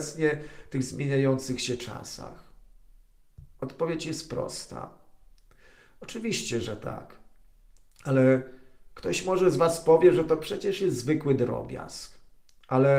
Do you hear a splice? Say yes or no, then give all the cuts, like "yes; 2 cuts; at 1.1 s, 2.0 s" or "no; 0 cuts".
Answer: no; 0 cuts